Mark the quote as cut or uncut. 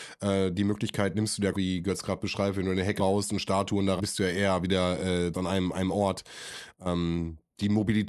cut